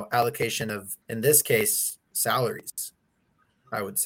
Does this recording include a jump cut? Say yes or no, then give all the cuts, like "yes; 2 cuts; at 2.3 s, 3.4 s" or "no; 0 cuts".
yes; 2 cuts; at 1.0 s, 2.1 s